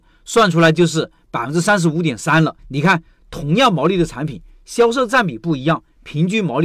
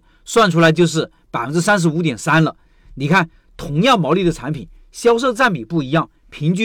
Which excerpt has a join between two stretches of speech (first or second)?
first